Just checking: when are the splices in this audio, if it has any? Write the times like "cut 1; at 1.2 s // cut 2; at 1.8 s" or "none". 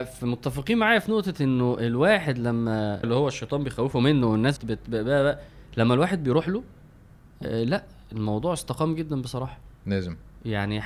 cut 1; at 3.0 s // cut 2; at 4.6 s